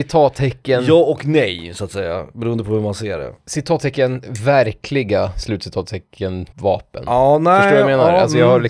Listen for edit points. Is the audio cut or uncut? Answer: cut